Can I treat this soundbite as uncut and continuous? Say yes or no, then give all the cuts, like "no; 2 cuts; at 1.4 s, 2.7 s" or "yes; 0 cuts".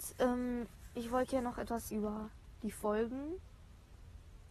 no; 1 cut; at 1.9 s